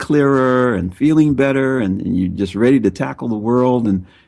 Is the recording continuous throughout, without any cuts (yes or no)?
yes